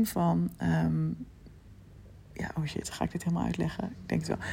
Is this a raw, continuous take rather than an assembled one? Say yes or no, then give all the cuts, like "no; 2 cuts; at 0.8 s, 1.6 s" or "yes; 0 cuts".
yes; 0 cuts